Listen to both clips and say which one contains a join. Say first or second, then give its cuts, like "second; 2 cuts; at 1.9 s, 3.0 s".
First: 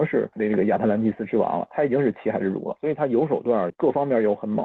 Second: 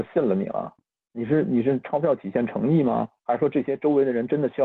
first; 1 cut; at 3.7 s